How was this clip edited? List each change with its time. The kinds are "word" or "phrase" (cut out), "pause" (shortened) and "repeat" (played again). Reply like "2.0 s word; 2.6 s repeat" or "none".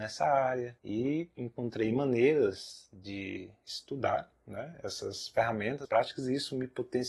5.8 s word